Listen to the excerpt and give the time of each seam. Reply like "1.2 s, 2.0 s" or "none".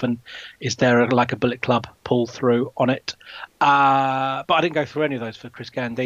2.0 s